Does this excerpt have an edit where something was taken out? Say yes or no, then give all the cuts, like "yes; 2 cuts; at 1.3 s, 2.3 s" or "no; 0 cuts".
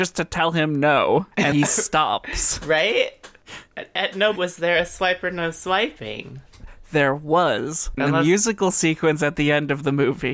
yes; 3 cuts; at 1.5 s, 4.4 s, 8.0 s